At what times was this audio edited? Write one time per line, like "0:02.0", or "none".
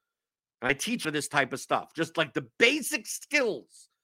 0:01.0